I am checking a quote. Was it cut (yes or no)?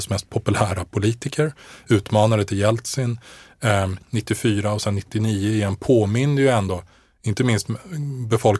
yes